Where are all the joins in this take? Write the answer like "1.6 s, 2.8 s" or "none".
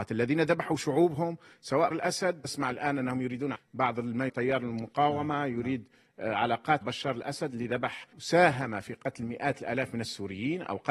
1.9 s, 2.4 s, 3.5 s, 4.3 s, 6.8 s, 8.1 s